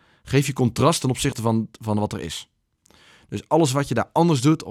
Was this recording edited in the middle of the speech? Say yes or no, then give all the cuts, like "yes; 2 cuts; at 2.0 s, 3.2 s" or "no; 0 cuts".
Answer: no; 0 cuts